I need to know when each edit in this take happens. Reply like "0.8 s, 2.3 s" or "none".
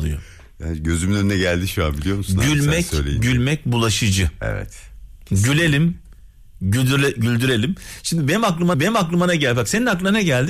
8.7 s